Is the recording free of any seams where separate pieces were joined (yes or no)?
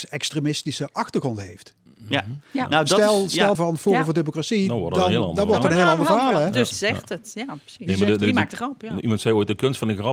no